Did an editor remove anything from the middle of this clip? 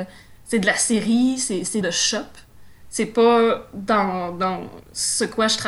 yes; 1 cut; at 1.8 s

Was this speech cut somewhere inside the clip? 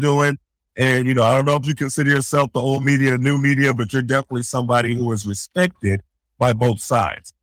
no; 0 cuts

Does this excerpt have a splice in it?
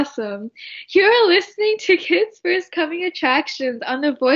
no; 0 cuts

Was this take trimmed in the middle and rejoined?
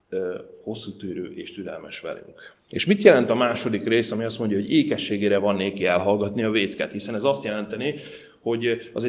yes; 1 cut; at 2.6 s

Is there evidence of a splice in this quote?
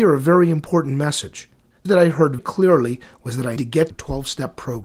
yes; 4 cuts; at 1.9 s, 2.4 s, 3.6 s, 3.9 s

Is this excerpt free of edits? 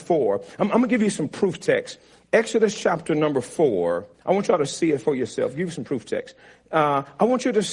no; 1 cut; at 4.1 s

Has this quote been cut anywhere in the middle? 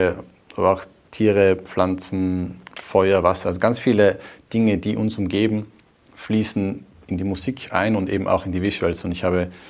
no; 0 cuts

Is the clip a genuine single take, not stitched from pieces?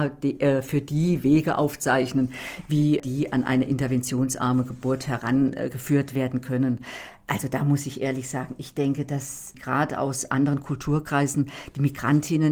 yes; 0 cuts

